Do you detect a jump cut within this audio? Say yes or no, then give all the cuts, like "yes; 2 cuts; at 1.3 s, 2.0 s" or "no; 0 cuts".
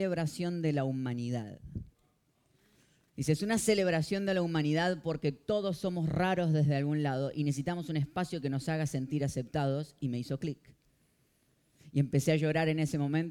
no; 0 cuts